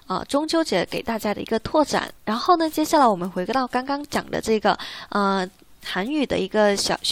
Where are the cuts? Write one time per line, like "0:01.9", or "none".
0:02.2